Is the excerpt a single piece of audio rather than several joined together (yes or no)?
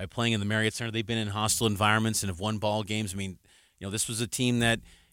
yes